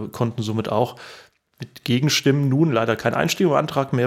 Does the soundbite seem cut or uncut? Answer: uncut